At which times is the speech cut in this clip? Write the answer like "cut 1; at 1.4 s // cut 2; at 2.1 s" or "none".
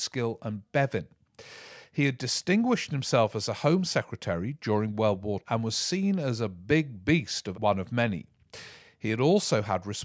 cut 1; at 5.4 s // cut 2; at 7.5 s